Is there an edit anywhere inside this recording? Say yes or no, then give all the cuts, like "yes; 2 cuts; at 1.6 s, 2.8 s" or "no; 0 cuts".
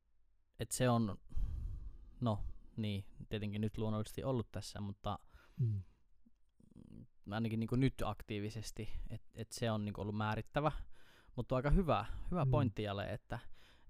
no; 0 cuts